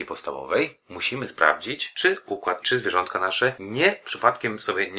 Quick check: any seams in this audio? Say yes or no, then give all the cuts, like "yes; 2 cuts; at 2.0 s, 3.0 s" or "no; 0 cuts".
yes; 1 cut; at 2.6 s